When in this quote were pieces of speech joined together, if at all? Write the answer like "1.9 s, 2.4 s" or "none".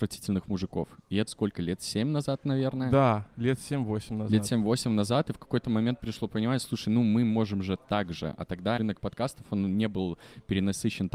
1.3 s, 6.0 s, 8.8 s